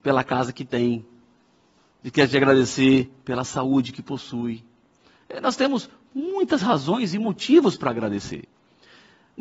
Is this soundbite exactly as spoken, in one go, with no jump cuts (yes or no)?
yes